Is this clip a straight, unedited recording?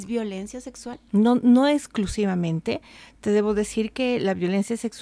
yes; 0 cuts

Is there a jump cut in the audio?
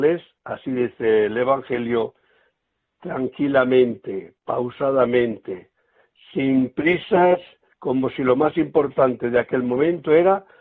no; 0 cuts

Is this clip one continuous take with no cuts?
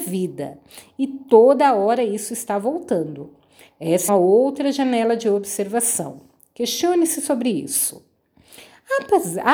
no; 1 cut; at 4.1 s

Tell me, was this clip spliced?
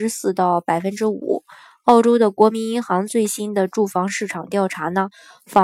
no; 0 cuts

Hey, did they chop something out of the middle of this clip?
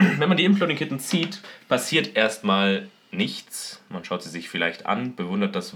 no; 0 cuts

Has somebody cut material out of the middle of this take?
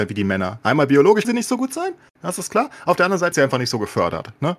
yes; 2 cuts; at 1.2 s, 3.3 s

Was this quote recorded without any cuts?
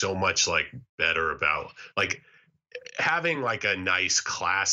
yes; 0 cuts

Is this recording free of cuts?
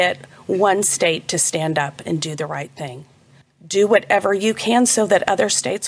yes; 0 cuts

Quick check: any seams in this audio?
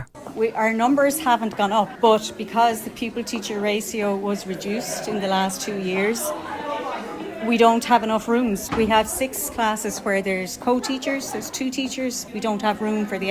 yes; 1 cut; at 12.3 s

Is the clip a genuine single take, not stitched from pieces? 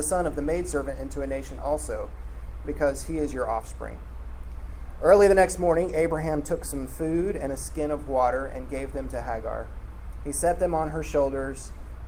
yes; 0 cuts

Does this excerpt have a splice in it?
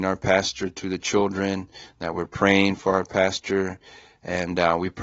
no; 0 cuts

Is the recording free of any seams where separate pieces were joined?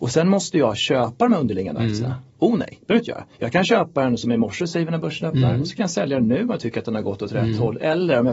no; 1 cut; at 3.3 s

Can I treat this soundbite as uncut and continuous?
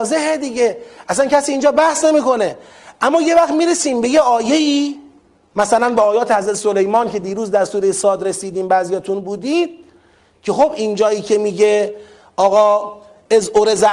yes; 0 cuts

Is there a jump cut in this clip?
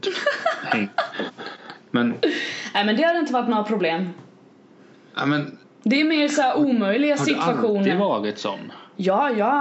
no; 0 cuts

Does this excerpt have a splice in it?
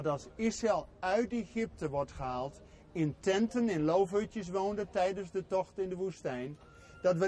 no; 0 cuts

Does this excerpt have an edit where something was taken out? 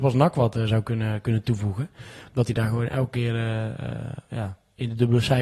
no; 0 cuts

